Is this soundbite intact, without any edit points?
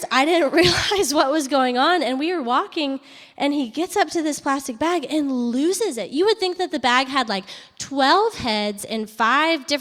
yes; 0 cuts

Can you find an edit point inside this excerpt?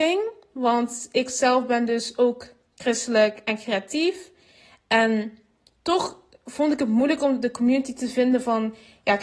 no; 0 cuts

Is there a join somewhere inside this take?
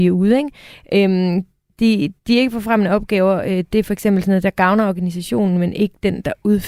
yes; 1 cut; at 2.2 s

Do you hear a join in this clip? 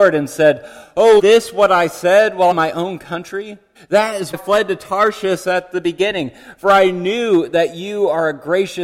yes; 4 cuts; at 1.2 s, 2.5 s, 3.7 s, 4.3 s

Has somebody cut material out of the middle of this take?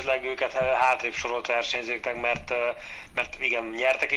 no; 0 cuts

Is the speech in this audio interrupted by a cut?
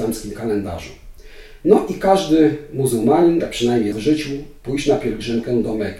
yes; 2 cuts; at 3.4 s, 3.9 s

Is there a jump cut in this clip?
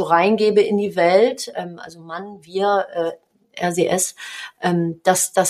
no; 0 cuts

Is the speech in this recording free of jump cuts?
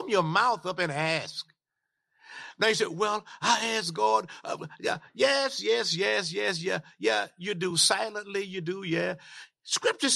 yes; 0 cuts

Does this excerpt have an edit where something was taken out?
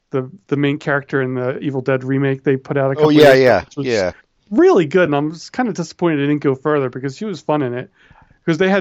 no; 0 cuts

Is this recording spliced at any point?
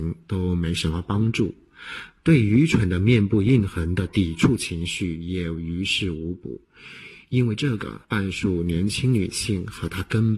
yes; 1 cut; at 8.0 s

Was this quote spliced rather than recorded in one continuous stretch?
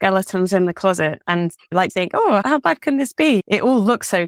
yes; 1 cut; at 1.9 s

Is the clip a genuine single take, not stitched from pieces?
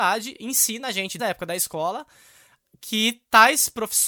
no; 1 cut; at 1.2 s

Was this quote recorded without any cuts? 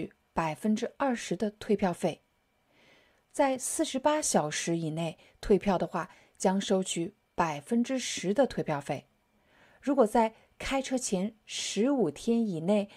yes; 0 cuts

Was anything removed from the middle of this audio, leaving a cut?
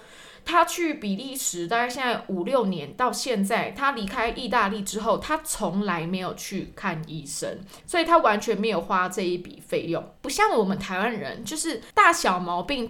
yes; 3 cuts; at 7.8 s, 10.2 s, 11.9 s

